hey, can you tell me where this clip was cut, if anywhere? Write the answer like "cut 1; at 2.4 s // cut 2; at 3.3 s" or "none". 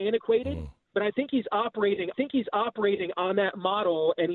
cut 1; at 2.1 s